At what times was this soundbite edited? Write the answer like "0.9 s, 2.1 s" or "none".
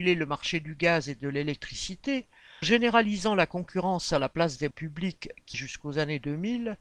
2.6 s, 4.7 s, 5.5 s